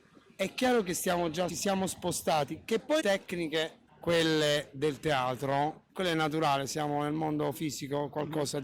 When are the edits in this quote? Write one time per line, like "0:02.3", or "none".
0:01.5
0:03.0
0:03.9
0:05.9